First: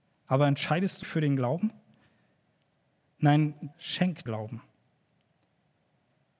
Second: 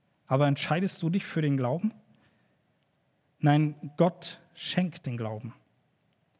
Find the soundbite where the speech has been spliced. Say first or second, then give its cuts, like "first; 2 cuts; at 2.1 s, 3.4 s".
first; 3 cuts; at 1.0 s, 3.7 s, 4.3 s